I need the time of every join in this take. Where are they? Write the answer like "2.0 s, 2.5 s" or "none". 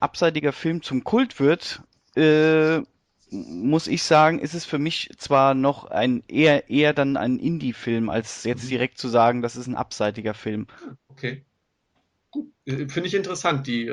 none